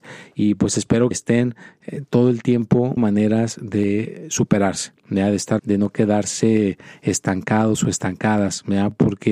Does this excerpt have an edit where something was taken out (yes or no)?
yes